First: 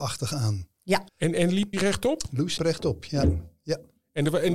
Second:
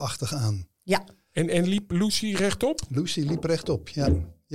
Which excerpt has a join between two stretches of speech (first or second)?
first